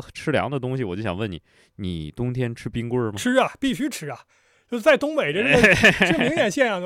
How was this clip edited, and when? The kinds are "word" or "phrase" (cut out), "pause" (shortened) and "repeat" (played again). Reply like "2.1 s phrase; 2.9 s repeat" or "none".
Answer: none